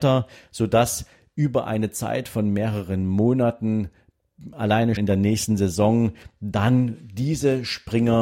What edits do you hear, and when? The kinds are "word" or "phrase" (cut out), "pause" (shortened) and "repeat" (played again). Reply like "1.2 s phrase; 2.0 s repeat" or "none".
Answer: 5.0 s word